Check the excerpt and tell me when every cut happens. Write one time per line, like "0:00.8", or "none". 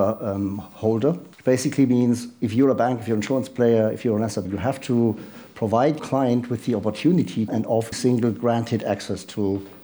0:01.3
0:04.4
0:06.0
0:07.5
0:07.9